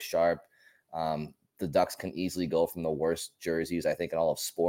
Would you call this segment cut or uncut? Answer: uncut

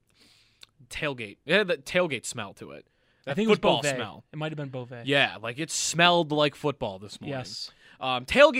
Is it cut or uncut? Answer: uncut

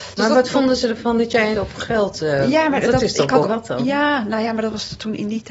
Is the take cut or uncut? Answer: cut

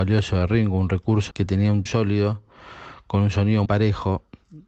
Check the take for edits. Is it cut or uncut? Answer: cut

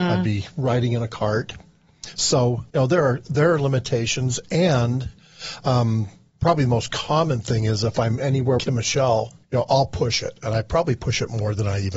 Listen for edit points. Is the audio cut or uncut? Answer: cut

